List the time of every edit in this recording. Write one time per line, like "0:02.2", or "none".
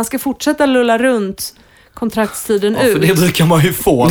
none

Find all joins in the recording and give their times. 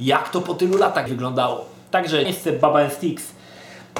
0:01.1
0:02.2

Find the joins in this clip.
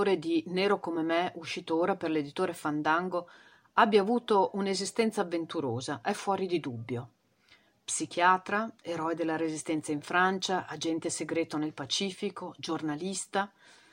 none

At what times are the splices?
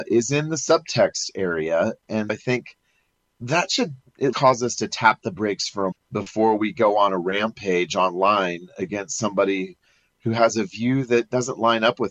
0:02.3
0:04.3
0:05.9

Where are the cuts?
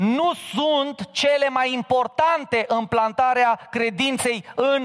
none

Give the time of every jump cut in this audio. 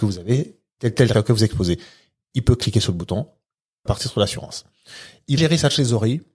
0:01.1
0:03.9
0:05.4

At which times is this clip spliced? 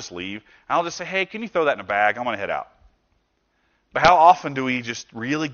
none

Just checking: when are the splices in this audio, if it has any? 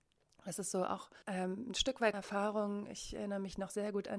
0:01.2
0:02.1

